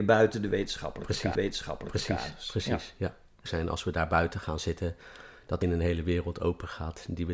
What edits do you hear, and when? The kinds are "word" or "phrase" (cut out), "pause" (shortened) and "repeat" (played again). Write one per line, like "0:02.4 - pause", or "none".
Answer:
0:01.3 - repeat
0:03.5 - phrase
0:05.6 - word